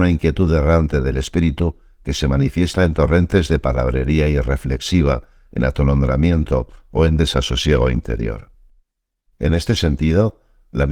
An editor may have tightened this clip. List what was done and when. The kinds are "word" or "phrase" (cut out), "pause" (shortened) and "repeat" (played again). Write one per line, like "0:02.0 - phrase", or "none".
none